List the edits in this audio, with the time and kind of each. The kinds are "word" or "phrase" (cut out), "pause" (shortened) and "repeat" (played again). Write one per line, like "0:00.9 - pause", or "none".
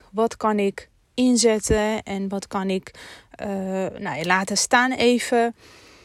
none